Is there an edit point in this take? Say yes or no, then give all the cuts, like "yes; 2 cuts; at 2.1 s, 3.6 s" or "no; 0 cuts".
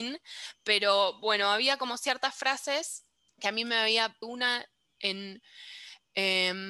yes; 2 cuts; at 3.3 s, 4.2 s